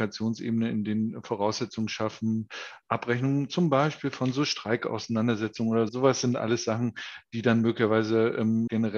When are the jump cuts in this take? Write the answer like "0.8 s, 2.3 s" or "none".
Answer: 5.9 s